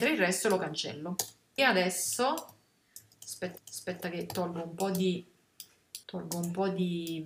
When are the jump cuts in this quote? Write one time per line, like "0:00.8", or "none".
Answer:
0:01.6
0:03.6
0:06.0